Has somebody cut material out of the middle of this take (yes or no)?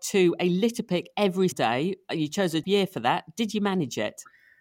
yes